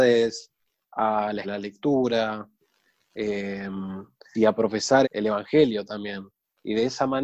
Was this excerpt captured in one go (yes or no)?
no